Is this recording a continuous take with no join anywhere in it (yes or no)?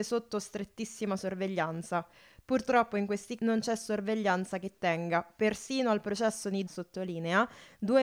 no